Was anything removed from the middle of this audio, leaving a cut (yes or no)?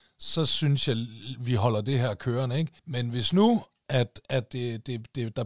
yes